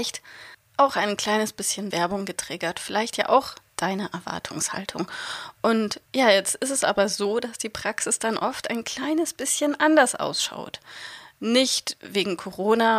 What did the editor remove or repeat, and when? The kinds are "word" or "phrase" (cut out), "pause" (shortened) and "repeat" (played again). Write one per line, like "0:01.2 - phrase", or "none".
0:01.9 - word
0:06.1 - pause